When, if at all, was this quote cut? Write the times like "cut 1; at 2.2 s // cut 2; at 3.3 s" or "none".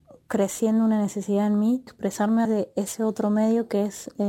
cut 1; at 1.9 s // cut 2; at 2.4 s